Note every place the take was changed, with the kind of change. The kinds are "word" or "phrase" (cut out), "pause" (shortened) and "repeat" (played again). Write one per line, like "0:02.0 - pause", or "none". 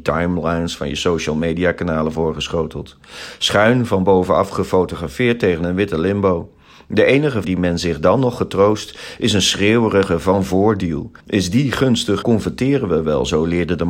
0:07.4 - word
0:11.2 - pause
0:12.2 - phrase